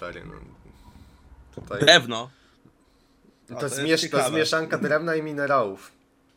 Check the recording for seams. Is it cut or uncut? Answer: uncut